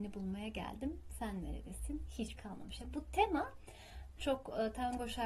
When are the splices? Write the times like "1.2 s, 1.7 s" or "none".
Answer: 2.4 s, 4.2 s